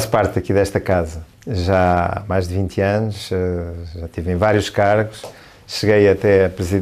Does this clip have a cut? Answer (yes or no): no